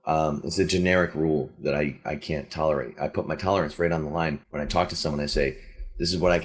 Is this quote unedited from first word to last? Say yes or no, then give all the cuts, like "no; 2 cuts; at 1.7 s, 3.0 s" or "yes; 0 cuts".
no; 1 cut; at 4.4 s